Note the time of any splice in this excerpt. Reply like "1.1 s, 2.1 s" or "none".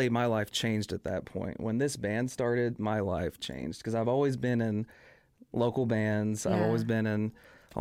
none